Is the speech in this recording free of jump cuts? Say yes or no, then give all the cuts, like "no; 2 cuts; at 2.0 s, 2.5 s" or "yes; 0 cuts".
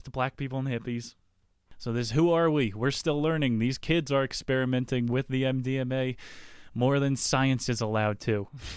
yes; 0 cuts